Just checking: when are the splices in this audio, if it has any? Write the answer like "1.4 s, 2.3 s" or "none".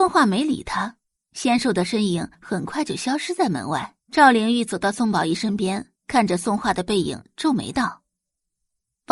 1.2 s, 2.3 s, 4.0 s, 6.0 s

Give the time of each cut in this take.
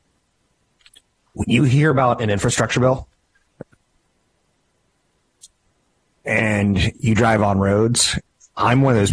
none

